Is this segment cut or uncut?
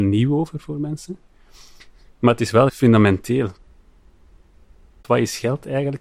cut